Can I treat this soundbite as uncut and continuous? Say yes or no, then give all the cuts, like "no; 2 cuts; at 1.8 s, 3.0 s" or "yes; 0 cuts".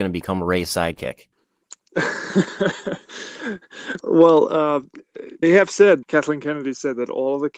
no; 3 cuts; at 4.0 s, 5.4 s, 6.0 s